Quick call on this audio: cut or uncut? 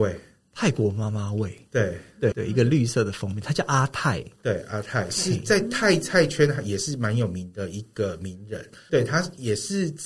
cut